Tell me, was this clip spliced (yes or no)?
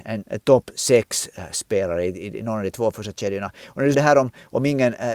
yes